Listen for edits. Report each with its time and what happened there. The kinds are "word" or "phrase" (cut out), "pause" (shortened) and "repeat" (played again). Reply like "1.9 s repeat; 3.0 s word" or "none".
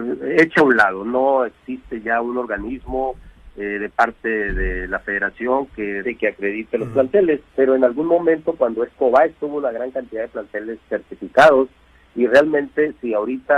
6.0 s word; 7.5 s pause; 9.0 s phrase